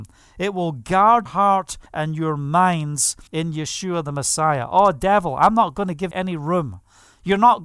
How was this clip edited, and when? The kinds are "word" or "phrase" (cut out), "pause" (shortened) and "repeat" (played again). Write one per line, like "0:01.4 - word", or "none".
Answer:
0:01.3 - word
0:01.9 - pause
0:03.3 - pause
0:06.1 - word